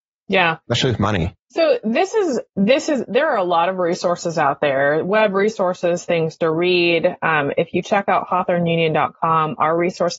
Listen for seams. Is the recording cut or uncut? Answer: cut